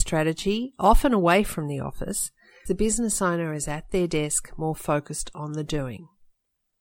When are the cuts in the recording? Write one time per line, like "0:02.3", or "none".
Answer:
0:02.7